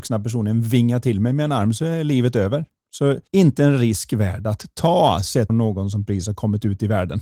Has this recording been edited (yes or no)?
yes